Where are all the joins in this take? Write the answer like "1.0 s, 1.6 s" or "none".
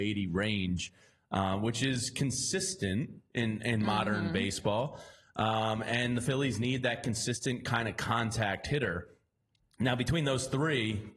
none

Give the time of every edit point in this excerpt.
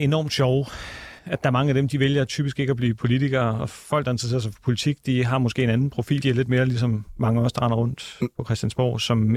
1.2 s, 6.2 s

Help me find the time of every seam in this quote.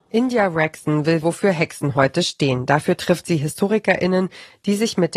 1.2 s

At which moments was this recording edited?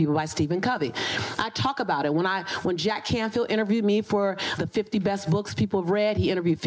4.6 s

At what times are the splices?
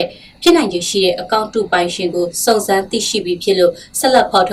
none

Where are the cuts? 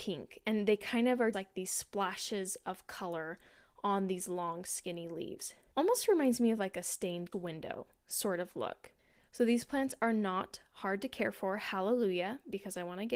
1.3 s, 7.3 s

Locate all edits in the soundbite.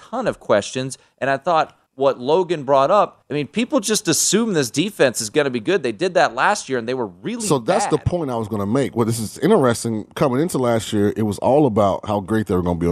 1.9 s, 3.2 s

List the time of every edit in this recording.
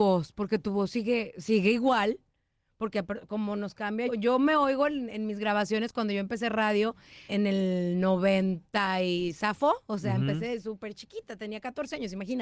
4.1 s, 7.3 s

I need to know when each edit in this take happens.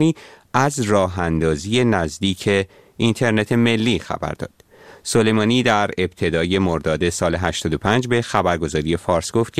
none

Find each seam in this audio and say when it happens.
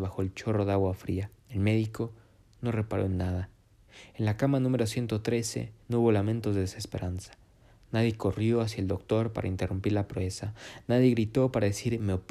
1.4 s, 5.8 s

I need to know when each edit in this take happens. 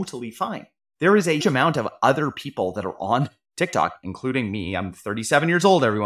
1.4 s

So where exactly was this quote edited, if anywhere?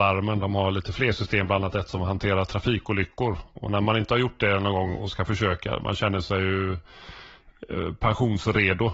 none

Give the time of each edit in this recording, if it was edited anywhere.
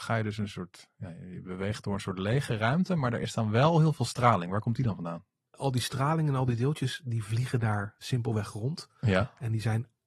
none

